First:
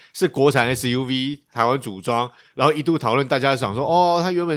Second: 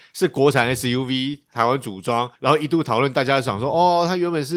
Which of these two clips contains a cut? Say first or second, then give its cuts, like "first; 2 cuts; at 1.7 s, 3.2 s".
second; 1 cut; at 2.4 s